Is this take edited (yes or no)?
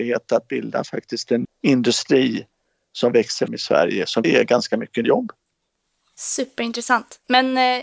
yes